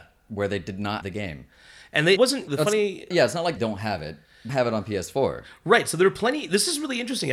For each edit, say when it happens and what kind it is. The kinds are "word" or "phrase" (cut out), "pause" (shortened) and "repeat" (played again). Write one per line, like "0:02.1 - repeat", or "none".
0:01.0 - word
0:02.2 - word
0:03.6 - word
0:04.5 - word

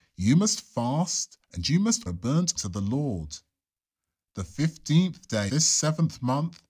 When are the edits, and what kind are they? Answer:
0:01.4 - pause
0:02.1 - word
0:02.6 - word
0:05.5 - word

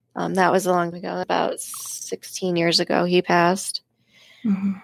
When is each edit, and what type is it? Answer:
0:00.9 - word
0:01.2 - word

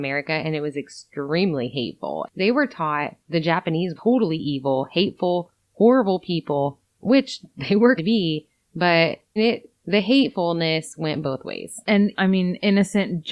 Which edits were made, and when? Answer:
0:03.2 - pause
0:04.0 - word
0:06.9 - pause
0:08.0 - phrase
0:09.4 - phrase
0:09.8 - pause
0:12.1 - word

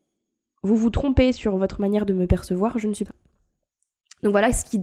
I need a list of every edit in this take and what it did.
0:03.1 - phrase

